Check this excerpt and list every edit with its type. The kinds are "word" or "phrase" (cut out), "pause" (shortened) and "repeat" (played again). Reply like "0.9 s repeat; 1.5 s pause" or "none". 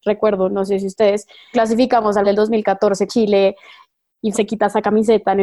1.5 s word; 2.2 s word; 3.1 s word; 4.3 s word